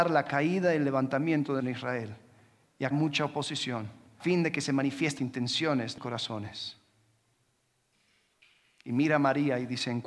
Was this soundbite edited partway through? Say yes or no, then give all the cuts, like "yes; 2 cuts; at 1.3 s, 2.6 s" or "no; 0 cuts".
yes; 5 cuts; at 1.6 s, 2.9 s, 4.2 s, 5.2 s, 6.0 s